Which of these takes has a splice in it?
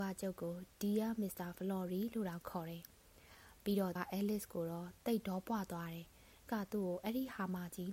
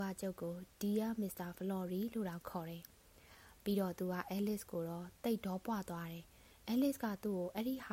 first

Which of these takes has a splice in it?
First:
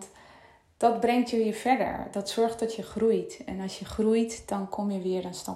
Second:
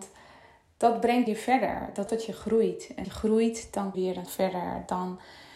second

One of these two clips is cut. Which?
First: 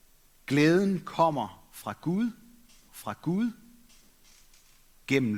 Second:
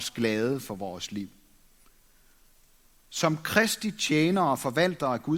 first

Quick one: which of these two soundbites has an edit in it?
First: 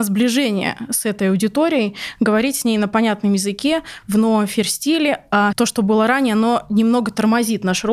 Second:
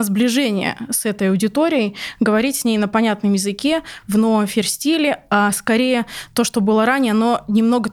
first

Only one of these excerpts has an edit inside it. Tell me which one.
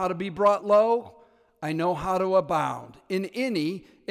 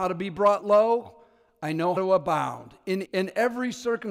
second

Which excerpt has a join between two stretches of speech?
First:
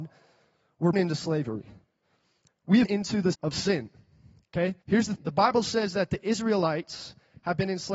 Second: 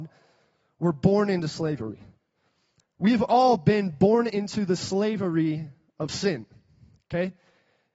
first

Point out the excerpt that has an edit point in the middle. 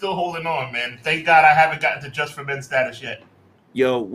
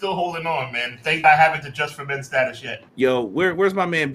second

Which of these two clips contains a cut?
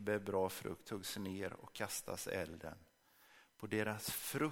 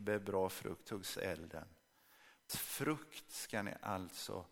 second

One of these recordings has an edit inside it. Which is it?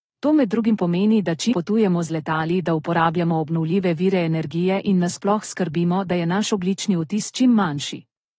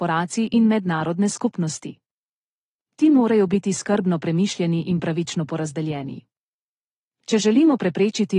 first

